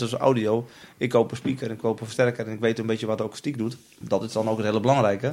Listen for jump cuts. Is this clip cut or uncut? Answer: uncut